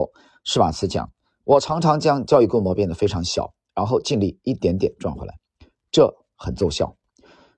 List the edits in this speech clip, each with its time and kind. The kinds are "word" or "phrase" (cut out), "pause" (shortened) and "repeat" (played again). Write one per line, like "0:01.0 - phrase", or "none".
none